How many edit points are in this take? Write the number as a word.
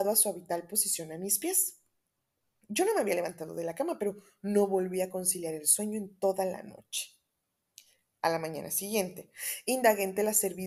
zero